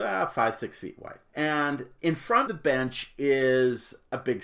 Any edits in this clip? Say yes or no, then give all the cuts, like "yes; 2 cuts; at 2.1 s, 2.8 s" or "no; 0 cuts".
yes; 2 cuts; at 1.3 s, 2.5 s